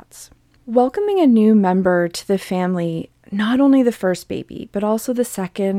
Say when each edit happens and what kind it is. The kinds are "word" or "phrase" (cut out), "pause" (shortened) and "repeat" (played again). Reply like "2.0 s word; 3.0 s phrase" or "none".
none

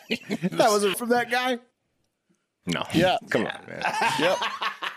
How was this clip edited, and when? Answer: 0.9 s phrase

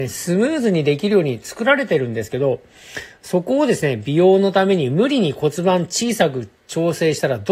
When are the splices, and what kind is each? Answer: 6.6 s pause

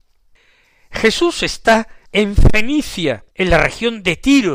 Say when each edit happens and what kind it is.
2.1 s pause; 3.3 s pause

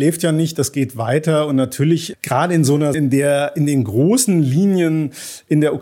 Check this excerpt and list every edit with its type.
2.1 s word; 2.9 s word

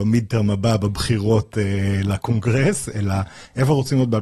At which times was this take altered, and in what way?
none

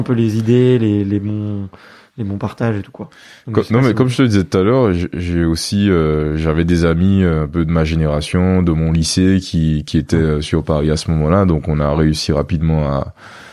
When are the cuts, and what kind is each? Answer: none

